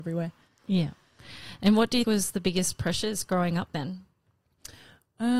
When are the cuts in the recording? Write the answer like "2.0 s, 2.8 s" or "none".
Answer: 2.0 s, 3.7 s